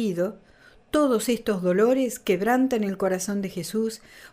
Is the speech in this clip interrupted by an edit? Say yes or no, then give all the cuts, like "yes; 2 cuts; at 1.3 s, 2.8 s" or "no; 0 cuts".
no; 0 cuts